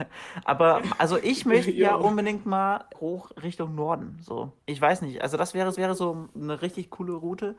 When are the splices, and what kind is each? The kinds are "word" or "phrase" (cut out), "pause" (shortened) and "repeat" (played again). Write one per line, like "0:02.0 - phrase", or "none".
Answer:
0:02.9 - word
0:04.6 - pause
0:05.8 - repeat